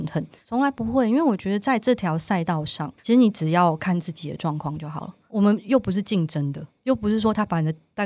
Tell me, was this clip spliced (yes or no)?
yes